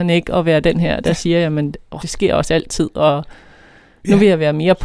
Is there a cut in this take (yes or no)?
yes